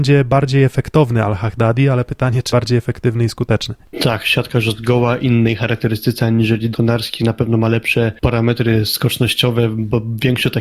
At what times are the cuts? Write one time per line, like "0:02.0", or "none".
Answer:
0:02.5
0:06.7